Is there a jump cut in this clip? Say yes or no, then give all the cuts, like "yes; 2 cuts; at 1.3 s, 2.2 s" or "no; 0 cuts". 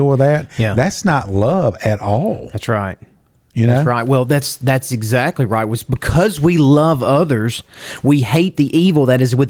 no; 0 cuts